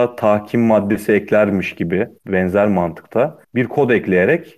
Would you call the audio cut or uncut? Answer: cut